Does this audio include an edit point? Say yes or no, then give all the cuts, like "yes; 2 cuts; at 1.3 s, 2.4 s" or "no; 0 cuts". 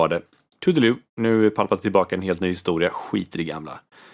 no; 0 cuts